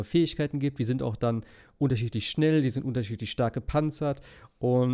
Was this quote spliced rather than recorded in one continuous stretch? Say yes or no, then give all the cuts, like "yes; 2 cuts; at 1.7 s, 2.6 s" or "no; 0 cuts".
no; 0 cuts